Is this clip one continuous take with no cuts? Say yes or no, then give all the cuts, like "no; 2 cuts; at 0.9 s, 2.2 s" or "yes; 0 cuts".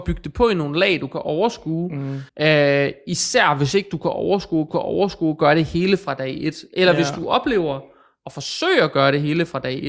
no; 2 cuts; at 2.3 s, 4.7 s